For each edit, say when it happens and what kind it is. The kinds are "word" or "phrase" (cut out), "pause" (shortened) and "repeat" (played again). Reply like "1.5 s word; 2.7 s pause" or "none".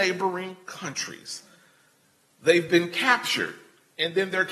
none